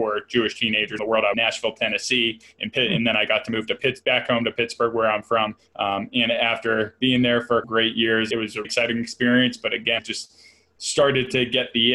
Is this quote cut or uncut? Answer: cut